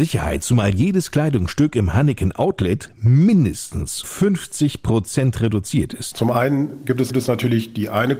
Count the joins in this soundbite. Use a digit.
2